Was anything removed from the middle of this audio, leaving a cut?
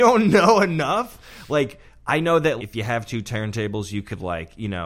yes; 1 cut; at 2.6 s

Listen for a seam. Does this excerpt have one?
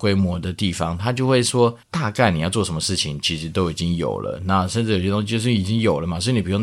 yes; 1 cut; at 1.8 s

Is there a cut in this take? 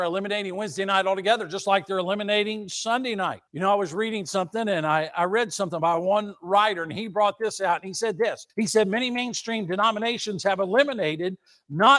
yes; 2 cuts; at 3.5 s, 8.5 s

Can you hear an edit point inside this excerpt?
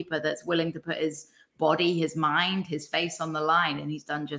no; 0 cuts

